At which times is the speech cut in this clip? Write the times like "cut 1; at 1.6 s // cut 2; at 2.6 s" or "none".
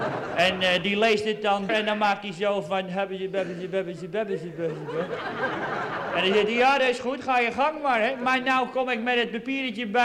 cut 1; at 1.7 s